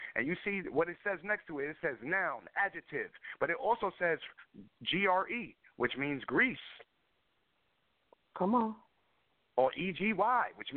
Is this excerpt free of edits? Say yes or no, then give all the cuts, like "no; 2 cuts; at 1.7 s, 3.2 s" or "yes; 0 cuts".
yes; 0 cuts